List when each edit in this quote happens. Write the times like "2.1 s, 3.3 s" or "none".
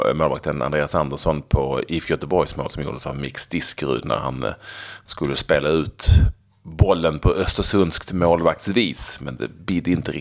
none